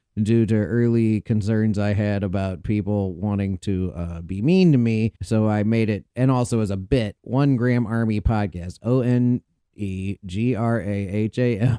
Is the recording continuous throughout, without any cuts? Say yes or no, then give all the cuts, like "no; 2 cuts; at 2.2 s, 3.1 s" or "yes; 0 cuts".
no; 1 cut; at 5.2 s